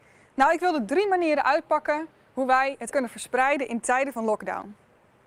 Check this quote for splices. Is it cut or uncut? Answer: cut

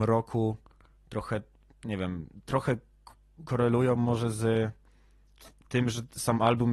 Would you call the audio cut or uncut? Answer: uncut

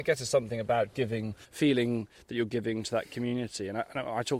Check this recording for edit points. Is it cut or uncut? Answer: cut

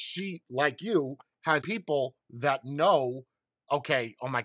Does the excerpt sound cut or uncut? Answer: cut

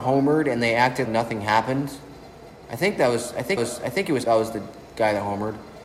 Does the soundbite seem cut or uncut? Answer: cut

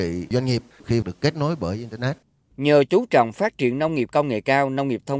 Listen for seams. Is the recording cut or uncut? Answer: uncut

